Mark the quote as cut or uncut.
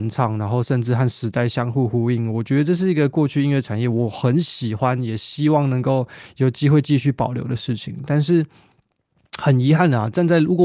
uncut